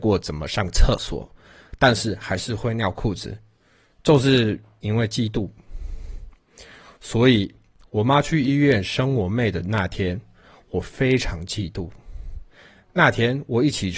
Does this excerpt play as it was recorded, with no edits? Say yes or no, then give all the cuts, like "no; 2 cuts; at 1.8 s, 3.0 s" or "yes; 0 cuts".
yes; 0 cuts